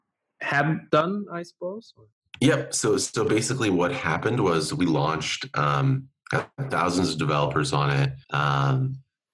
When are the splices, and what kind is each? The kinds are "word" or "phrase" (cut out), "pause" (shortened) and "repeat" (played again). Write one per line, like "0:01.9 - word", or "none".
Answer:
0:02.1 - pause
0:08.2 - pause